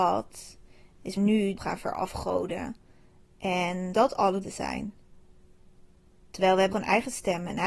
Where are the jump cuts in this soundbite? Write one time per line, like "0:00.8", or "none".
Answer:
0:01.2
0:01.6
0:03.9
0:04.4
0:06.7